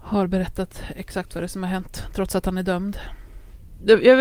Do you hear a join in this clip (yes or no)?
no